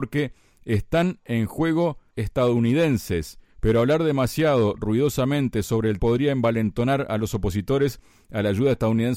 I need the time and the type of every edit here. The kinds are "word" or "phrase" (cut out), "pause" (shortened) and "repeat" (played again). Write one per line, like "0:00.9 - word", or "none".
0:02.1 - word
0:03.5 - pause
0:06.0 - word